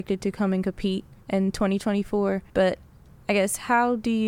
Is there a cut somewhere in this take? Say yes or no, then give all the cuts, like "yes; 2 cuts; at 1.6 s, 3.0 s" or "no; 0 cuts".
yes; 2 cuts; at 1.2 s, 2.5 s